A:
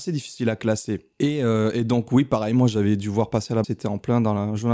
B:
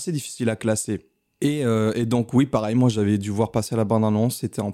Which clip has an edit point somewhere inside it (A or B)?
A